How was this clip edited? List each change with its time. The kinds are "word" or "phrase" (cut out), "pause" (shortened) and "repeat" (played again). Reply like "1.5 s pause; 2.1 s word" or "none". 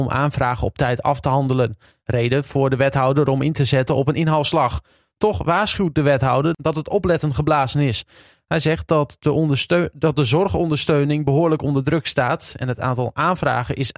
none